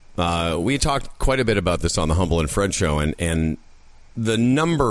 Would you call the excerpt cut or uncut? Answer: uncut